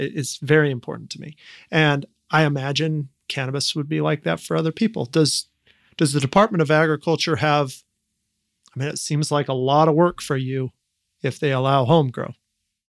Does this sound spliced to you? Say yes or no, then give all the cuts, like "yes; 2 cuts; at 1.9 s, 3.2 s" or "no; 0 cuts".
no; 0 cuts